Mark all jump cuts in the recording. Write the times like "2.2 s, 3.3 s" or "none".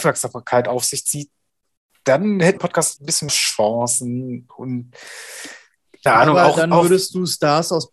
2.6 s, 3.0 s, 3.3 s, 6.1 s